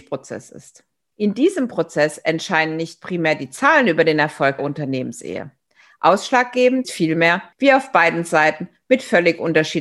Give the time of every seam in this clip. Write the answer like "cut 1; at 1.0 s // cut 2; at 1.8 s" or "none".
cut 1; at 4.6 s // cut 2; at 6.8 s